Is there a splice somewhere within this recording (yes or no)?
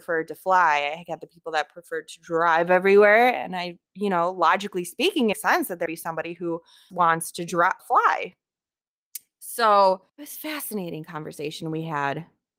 yes